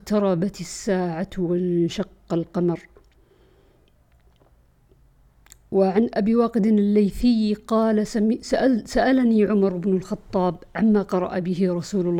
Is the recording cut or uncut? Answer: uncut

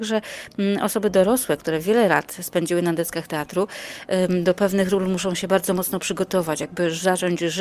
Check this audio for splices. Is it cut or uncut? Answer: uncut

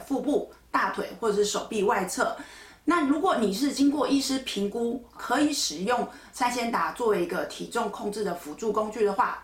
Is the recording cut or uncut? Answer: cut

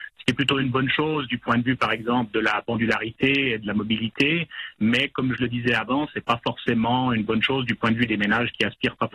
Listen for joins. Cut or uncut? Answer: uncut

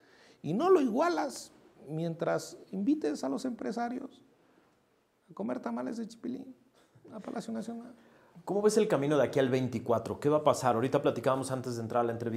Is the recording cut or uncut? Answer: uncut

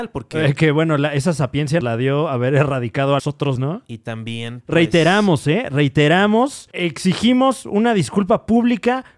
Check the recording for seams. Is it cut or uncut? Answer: cut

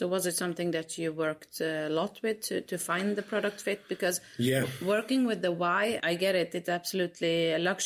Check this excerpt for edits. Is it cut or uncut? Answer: cut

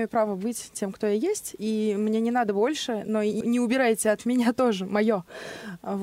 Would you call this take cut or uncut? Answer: cut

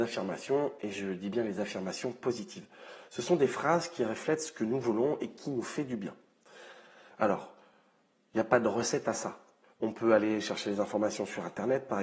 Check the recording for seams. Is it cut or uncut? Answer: uncut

